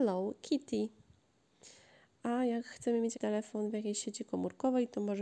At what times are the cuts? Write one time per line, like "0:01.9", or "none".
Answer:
0:03.1